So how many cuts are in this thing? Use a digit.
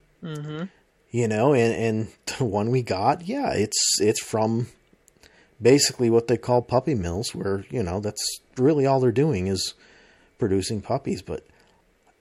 0